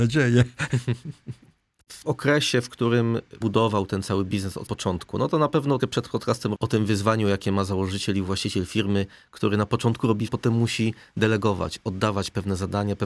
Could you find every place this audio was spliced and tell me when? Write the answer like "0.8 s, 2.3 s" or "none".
2.0 s, 3.4 s, 4.7 s, 5.8 s, 6.5 s, 10.3 s